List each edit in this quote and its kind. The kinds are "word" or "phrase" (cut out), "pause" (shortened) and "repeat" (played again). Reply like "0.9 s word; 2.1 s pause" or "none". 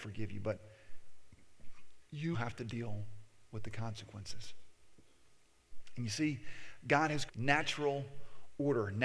2.3 s word; 7.3 s phrase